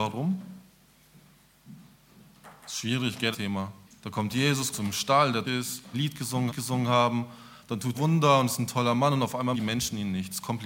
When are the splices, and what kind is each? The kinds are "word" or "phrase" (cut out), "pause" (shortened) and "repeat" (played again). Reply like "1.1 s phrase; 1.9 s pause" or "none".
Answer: 3.3 s word; 3.9 s pause; 4.7 s phrase; 5.4 s word; 5.9 s phrase; 6.5 s repeat; 7.9 s word; 9.5 s word